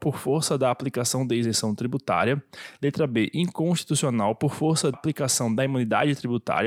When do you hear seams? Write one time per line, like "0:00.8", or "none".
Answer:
0:04.9